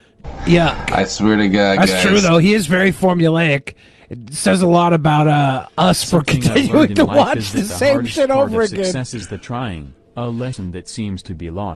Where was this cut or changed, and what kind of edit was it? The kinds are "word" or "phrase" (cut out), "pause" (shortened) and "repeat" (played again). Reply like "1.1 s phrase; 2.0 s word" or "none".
none